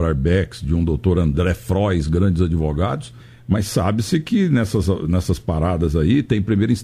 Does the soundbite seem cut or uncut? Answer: cut